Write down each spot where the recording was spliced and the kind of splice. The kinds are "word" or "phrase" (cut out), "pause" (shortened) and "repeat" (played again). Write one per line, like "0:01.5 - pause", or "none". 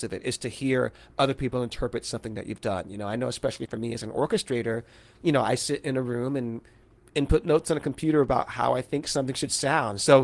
none

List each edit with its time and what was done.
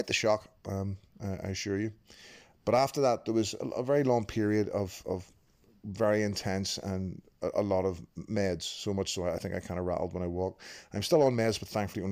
none

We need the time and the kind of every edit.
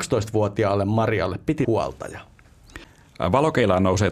0:01.6 - word

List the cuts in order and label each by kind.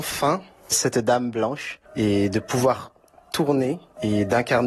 0:01.9 - pause

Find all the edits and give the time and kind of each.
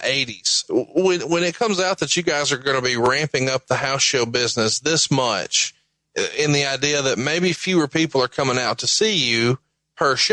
none

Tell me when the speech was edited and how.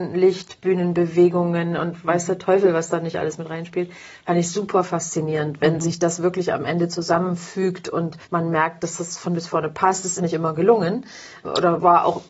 0:08.2 - pause
0:09.3 - word
0:10.2 - phrase

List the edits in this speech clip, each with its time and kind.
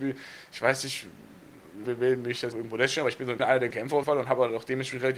0:01.8 - word
0:02.5 - word
0:03.4 - word
0:03.7 - word
0:04.0 - word

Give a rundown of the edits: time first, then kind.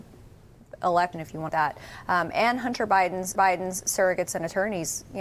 0:01.1 - word
0:01.5 - phrase
0:03.4 - repeat

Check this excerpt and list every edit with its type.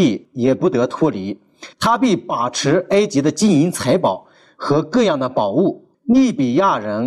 0:01.7 - pause
0:05.9 - pause

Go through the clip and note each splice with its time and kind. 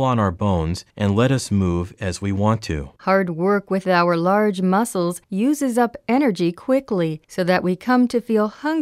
0:00.9 - pause
0:03.0 - pause
0:05.2 - pause
0:07.2 - pause

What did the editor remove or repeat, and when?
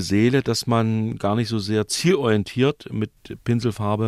none

